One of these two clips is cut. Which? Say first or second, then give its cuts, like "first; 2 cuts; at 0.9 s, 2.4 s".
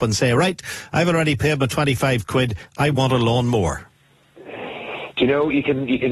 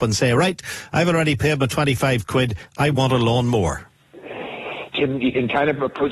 second; 2 cuts; at 4.0 s, 5.0 s